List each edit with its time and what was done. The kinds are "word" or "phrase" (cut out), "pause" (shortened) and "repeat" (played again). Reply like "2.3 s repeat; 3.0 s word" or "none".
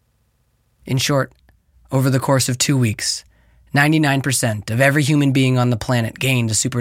none